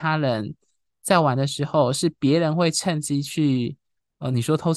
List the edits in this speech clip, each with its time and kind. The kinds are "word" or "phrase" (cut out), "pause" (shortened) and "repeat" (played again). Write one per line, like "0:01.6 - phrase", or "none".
none

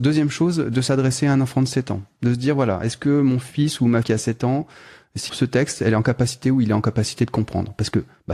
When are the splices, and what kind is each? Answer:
0:04.0 - word
0:05.3 - phrase

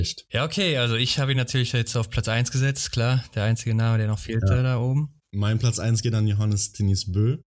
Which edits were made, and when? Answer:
none

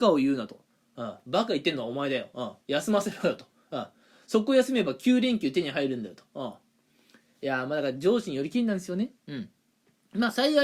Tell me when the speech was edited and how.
0:02.6 - pause
0:09.2 - pause

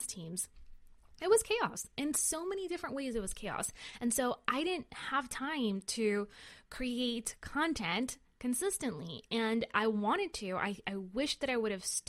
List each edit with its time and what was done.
none

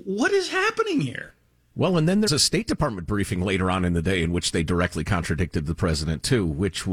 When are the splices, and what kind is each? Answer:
0:02.3 - word

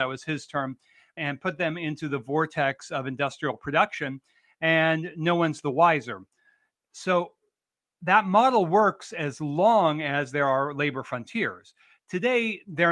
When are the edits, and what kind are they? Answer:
none

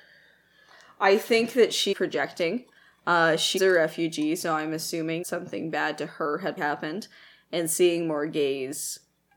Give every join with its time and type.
0:01.9 - word
0:03.6 - word
0:05.2 - word
0:06.6 - word

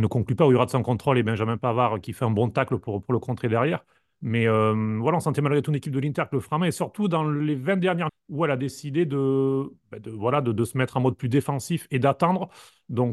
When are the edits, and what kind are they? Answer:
0:02.0 - word
0:08.1 - word

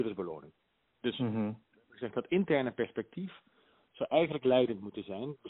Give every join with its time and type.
none

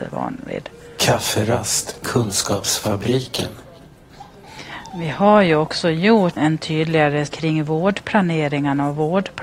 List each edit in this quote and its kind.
0:02.0 - word
0:06.4 - word
0:07.3 - word

